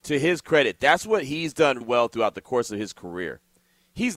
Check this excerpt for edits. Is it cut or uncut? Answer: cut